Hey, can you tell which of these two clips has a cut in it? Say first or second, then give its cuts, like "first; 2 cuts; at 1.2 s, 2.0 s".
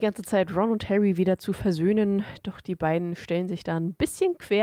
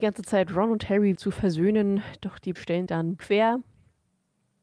second; 4 cuts; at 1.2 s, 2.6 s, 2.9 s, 3.2 s